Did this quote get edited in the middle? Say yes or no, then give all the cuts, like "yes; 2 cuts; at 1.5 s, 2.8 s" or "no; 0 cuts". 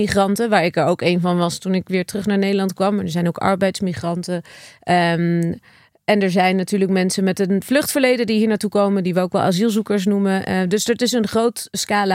no; 0 cuts